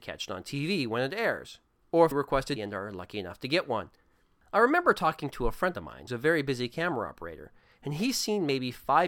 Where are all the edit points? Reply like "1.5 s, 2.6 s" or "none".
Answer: 2.1 s, 2.6 s, 6.1 s